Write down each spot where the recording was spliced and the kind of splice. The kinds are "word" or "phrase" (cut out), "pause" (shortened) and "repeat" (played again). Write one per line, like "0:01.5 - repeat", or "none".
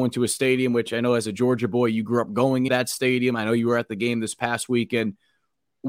0:02.7 - word